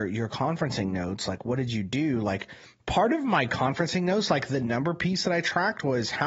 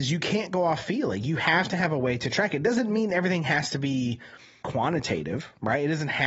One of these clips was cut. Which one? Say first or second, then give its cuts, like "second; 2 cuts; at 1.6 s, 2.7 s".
second; 1 cut; at 4.6 s